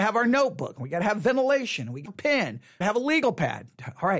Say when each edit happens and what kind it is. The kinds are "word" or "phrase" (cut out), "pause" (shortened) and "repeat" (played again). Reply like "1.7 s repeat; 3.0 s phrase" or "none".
2.1 s phrase; 2.8 s phrase